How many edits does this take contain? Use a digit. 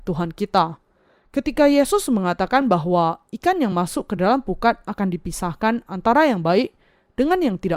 0